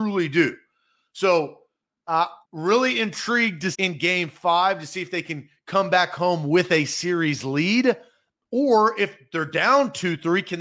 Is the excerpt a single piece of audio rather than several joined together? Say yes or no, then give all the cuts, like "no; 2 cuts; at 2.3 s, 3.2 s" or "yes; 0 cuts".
no; 2 cuts; at 2.4 s, 3.7 s